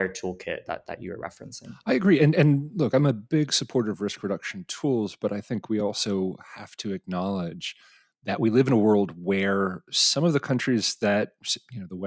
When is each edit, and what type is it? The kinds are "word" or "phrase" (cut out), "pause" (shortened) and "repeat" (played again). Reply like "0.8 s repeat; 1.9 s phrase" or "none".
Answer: none